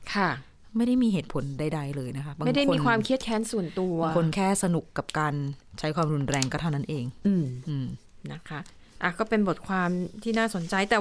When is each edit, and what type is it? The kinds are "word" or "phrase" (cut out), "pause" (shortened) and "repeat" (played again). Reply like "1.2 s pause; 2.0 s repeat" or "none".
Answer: none